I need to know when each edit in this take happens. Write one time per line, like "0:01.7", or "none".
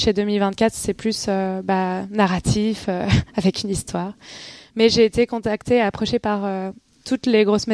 none